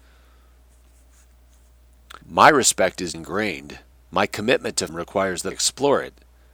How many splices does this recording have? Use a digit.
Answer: 5